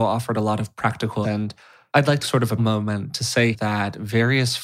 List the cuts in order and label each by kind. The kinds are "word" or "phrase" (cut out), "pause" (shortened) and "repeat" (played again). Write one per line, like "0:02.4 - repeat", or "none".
0:01.2 - word
0:02.2 - word
0:02.6 - word
0:03.5 - word